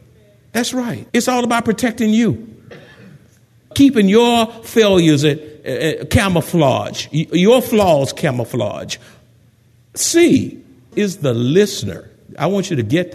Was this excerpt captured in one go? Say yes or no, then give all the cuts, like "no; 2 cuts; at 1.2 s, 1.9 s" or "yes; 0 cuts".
no; 2 cuts; at 1.1 s, 10.9 s